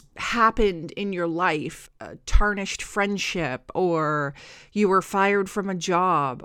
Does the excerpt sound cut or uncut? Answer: cut